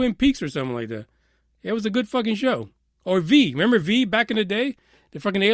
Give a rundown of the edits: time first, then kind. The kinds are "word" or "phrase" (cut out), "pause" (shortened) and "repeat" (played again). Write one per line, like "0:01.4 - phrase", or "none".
none